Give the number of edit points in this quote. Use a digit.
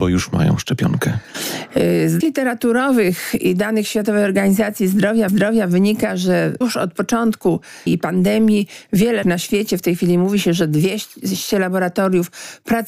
5